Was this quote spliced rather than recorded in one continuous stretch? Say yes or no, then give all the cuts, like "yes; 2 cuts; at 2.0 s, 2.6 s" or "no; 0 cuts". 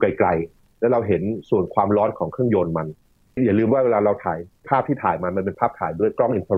no; 0 cuts